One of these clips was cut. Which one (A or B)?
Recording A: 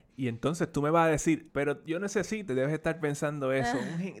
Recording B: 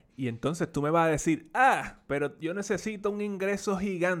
A